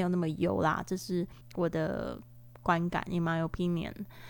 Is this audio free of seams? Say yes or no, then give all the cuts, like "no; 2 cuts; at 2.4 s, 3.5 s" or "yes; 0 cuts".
no; 1 cut; at 1.4 s